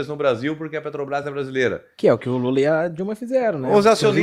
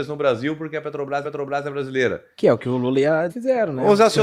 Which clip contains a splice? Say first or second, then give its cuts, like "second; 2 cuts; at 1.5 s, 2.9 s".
second; 2 cuts; at 1.2 s, 3.3 s